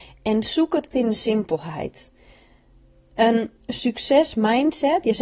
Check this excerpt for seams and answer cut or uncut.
cut